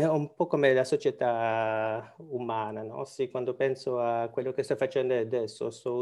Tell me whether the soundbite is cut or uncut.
uncut